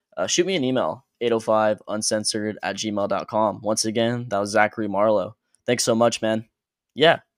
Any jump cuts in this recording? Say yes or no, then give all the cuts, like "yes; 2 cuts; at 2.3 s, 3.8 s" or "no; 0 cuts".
no; 0 cuts